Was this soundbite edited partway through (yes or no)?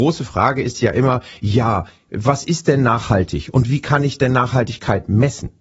no